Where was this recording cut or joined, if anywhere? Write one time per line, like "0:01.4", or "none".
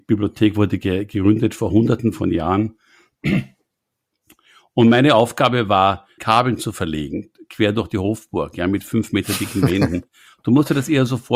0:06.2